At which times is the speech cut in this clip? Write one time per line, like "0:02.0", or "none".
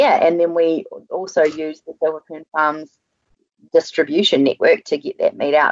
none